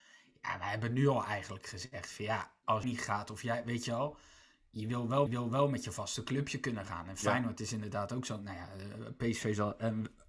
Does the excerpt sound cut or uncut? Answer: cut